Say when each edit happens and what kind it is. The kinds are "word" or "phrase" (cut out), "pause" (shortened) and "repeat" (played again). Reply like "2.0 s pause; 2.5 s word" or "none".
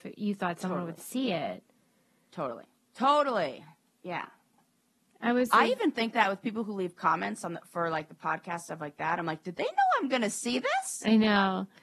none

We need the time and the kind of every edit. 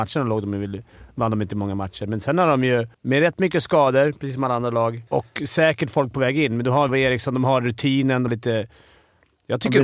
2.9 s pause; 5.1 s pause; 6.9 s word; 8.3 s word

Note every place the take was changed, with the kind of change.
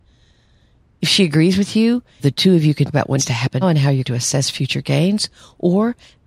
2.2 s word; 2.9 s word; 3.2 s word; 3.6 s word; 4.0 s word

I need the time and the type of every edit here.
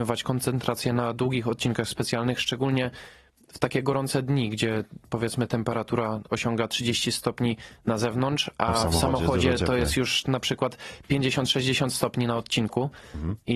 none

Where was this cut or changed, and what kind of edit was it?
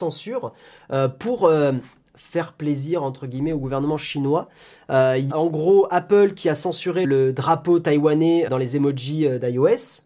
5.3 s word; 7.0 s word; 8.5 s word

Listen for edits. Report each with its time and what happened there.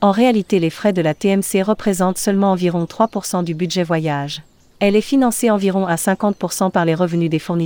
none

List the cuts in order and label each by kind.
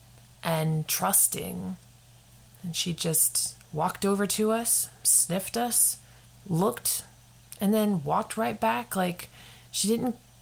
2.2 s pause; 6.2 s pause

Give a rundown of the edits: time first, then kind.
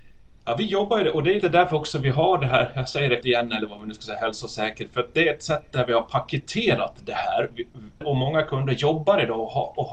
1.4 s word; 3.2 s word; 8.0 s word

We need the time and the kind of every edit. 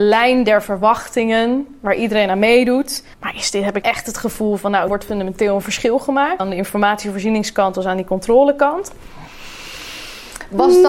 3.1 s pause; 3.8 s word; 4.9 s word; 6.4 s word

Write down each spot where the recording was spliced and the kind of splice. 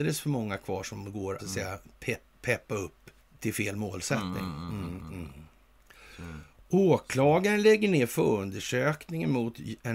1.4 s word; 3.2 s pause; 6.7 s pause

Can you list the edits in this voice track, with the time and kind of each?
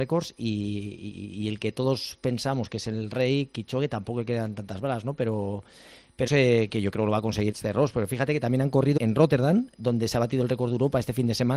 6.3 s word; 7.5 s word; 9.0 s word

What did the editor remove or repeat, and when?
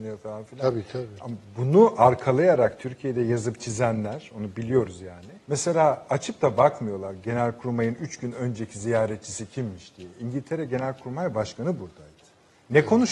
5.4 s pause

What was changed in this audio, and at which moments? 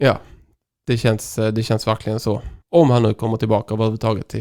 2.6 s pause

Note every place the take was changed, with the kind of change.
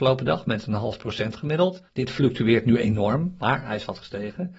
1.9 s pause

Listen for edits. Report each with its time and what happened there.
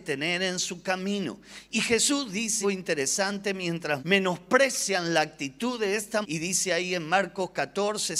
2.6 s word; 4.0 s word; 6.2 s word

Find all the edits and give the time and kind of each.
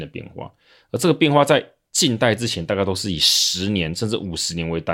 none

